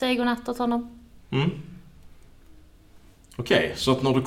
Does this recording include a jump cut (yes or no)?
no